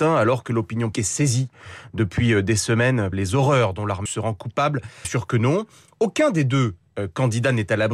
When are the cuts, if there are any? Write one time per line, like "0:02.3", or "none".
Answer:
0:00.9
0:03.1
0:04.1
0:05.0